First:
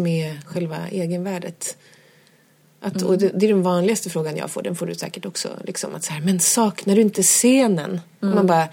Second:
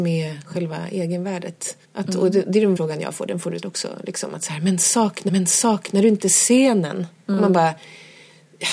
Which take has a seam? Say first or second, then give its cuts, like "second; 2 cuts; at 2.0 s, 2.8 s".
second; 4 cuts; at 1.8 s, 2.8 s, 3.6 s, 5.3 s